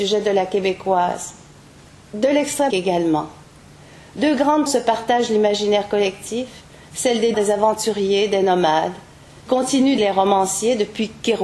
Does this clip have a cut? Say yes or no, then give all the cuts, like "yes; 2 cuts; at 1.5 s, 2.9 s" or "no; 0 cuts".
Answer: yes; 5 cuts; at 2.7 s, 4.7 s, 7.3 s, 9.5 s, 10.0 s